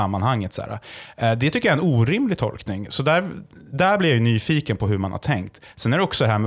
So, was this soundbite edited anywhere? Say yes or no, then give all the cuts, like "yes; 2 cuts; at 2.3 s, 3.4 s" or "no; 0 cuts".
no; 0 cuts